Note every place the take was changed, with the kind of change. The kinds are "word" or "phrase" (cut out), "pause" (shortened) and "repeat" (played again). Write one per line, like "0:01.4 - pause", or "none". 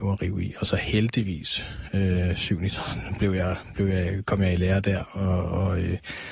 none